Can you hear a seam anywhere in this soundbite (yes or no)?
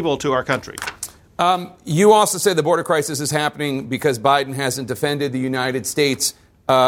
no